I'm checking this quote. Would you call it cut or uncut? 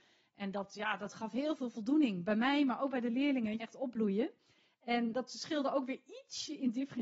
cut